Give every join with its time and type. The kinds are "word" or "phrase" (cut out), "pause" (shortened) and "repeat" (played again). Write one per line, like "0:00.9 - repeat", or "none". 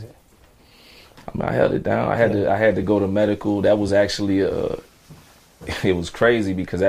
none